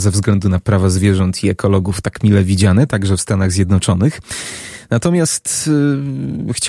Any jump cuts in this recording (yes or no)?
yes